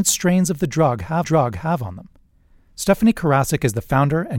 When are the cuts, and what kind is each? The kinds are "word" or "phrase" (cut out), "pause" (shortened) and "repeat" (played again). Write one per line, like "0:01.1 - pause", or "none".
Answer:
0:01.2 - repeat